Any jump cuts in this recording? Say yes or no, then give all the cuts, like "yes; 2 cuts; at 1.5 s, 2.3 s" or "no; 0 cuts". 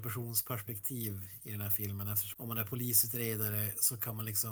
yes; 1 cut; at 2.3 s